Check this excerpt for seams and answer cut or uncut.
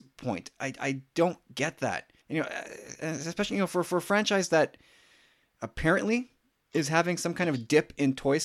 cut